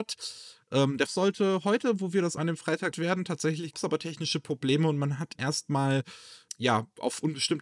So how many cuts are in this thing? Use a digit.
6